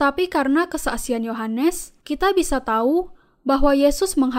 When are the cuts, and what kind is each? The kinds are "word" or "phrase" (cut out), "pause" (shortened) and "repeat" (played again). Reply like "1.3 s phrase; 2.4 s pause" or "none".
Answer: 2.0 s pause